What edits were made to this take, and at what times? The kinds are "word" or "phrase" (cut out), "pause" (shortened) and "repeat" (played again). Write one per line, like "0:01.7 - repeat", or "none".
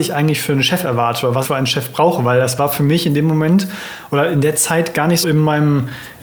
0:01.4 - word
0:05.2 - word